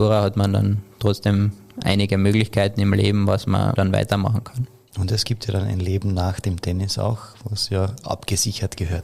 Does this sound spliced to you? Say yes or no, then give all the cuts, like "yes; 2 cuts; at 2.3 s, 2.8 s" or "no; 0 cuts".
no; 0 cuts